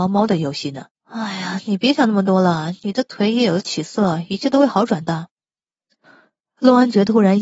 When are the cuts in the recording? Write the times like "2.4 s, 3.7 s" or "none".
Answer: 0.9 s